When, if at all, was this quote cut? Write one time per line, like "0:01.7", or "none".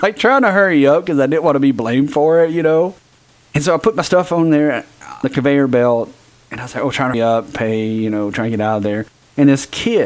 0:05.2
0:07.1